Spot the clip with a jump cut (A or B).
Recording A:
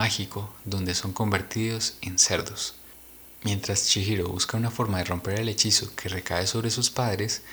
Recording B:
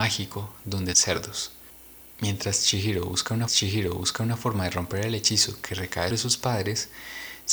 B